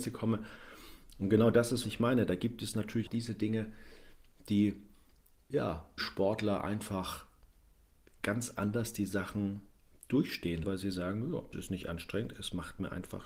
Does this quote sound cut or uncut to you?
cut